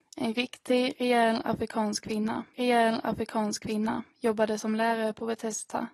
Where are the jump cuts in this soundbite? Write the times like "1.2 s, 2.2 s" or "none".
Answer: 2.5 s